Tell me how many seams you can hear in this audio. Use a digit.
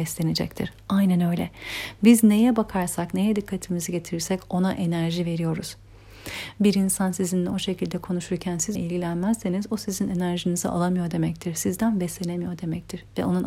2